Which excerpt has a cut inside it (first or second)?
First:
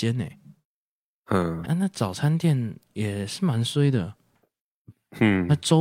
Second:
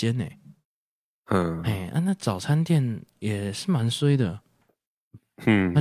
first